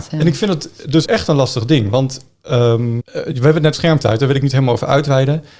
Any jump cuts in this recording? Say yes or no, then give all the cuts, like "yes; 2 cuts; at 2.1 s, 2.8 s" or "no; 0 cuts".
yes; 3 cuts; at 1.0 s, 3.0 s, 3.7 s